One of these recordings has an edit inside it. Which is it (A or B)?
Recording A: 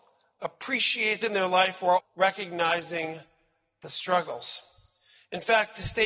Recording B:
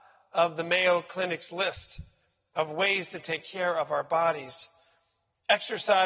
A